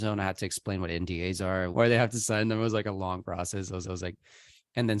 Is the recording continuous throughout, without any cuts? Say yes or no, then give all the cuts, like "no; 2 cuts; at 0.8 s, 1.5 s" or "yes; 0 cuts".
no; 2 cuts; at 1.7 s, 3.8 s